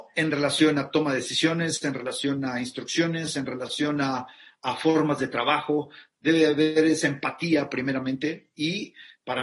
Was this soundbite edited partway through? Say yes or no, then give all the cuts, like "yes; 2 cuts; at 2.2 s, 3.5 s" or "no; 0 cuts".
no; 0 cuts